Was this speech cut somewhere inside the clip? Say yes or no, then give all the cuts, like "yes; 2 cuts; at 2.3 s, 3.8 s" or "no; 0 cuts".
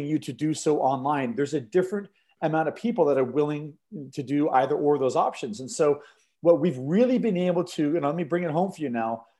no; 0 cuts